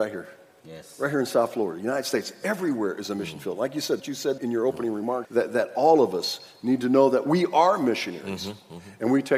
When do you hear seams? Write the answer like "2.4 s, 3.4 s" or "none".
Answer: 4.0 s, 4.4 s, 5.2 s